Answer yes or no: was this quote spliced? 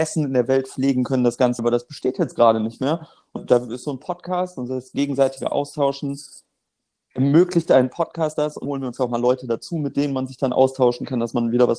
yes